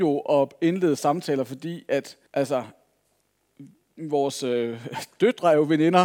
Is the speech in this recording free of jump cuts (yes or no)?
no